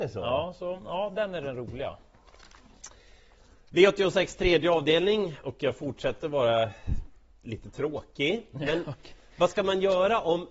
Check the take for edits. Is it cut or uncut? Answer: uncut